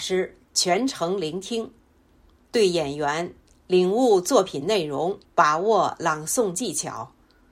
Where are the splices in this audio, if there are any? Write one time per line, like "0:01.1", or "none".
0:05.2